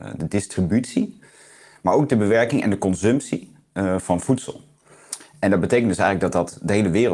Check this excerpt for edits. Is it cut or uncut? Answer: uncut